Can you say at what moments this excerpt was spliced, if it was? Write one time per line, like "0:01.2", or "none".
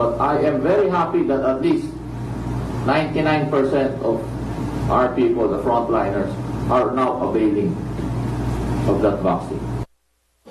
none